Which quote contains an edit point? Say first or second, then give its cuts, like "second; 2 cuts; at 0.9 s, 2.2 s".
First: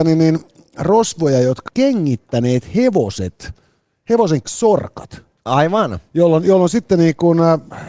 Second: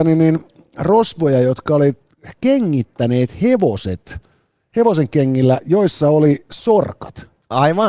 first; 2 cuts; at 1.7 s, 4.4 s